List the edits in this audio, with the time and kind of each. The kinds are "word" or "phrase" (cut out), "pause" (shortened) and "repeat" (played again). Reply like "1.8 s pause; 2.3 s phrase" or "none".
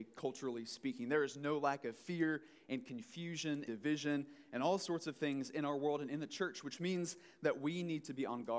3.7 s word

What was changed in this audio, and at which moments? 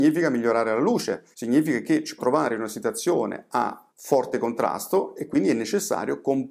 1.3 s pause; 2.2 s word; 3.9 s pause

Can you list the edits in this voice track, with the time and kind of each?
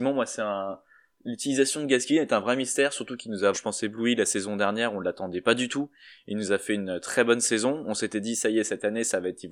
3.5 s word

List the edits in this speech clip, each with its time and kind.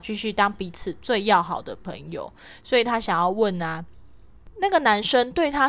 none

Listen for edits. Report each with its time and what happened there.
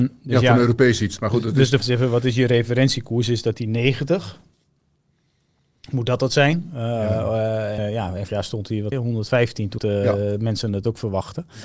1.8 s word; 7.8 s word; 8.3 s word; 8.9 s word; 9.8 s word

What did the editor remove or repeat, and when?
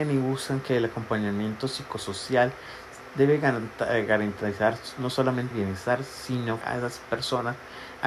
5.5 s word; 6.6 s word

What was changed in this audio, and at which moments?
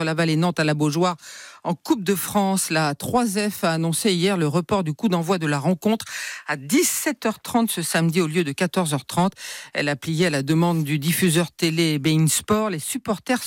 none

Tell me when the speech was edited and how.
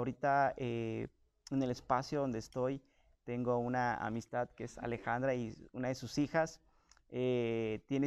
none

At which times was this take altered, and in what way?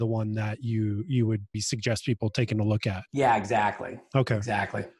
1.5 s word; 3.1 s pause

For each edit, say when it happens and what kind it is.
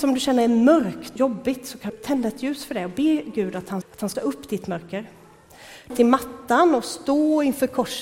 1.2 s word; 1.9 s word; 3.8 s word; 4.1 s word; 5.9 s phrase

